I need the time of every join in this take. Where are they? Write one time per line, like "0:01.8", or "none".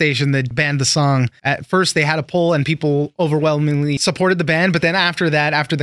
none